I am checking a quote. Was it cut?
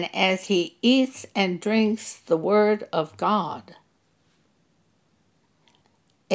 no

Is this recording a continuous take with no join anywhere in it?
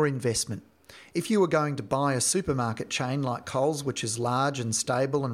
yes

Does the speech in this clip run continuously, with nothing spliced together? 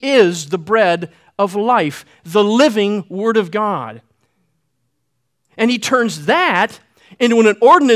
yes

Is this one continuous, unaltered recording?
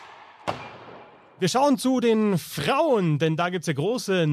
yes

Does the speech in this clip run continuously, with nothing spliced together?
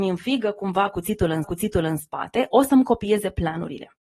no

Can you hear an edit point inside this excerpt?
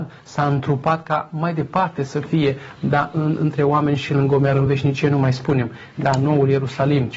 no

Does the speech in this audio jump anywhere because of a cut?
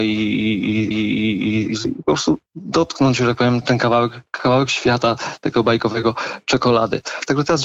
yes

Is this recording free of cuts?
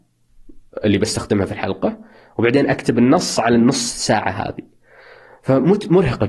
yes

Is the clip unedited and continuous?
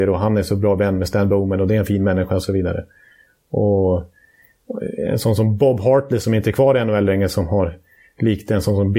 yes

